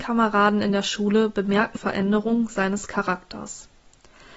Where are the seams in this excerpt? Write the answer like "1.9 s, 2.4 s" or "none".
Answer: 1.7 s